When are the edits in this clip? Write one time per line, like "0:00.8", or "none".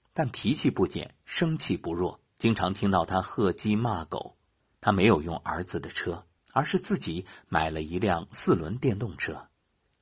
0:02.3
0:04.6
0:06.4